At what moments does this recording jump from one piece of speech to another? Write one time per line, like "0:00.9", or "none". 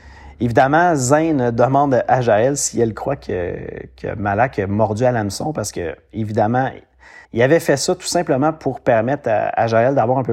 0:07.2